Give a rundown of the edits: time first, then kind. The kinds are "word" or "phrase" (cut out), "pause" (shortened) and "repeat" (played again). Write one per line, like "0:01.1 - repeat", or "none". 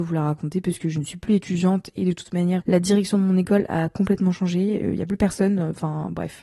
0:02.6 - word